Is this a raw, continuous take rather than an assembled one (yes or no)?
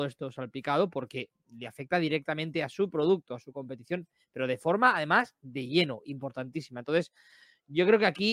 yes